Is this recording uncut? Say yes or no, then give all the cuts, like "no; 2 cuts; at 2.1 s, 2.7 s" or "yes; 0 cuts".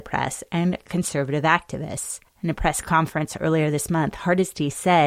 no; 1 cut; at 2.3 s